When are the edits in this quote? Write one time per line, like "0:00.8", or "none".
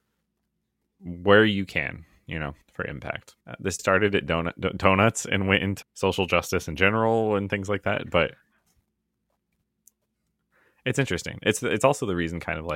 0:02.6
0:03.4
0:03.8
0:05.8